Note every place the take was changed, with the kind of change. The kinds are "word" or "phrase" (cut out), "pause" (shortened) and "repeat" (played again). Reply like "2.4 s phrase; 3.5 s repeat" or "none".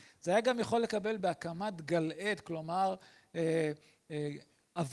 1.2 s word